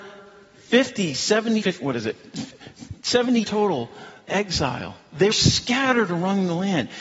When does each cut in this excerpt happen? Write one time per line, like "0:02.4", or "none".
0:01.6
0:03.4
0:04.3
0:05.3